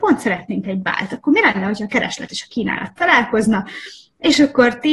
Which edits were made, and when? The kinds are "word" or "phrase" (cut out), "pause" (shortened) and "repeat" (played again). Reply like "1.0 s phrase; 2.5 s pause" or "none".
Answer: none